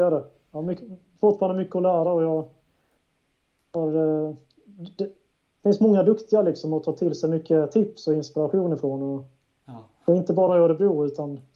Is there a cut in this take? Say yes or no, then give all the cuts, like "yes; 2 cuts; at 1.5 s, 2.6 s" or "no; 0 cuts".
no; 0 cuts